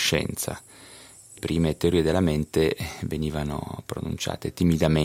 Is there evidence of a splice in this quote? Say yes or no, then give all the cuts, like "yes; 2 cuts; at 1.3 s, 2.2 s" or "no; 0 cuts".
yes; 1 cut; at 1.4 s